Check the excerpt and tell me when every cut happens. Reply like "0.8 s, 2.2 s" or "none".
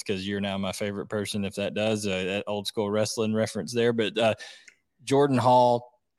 none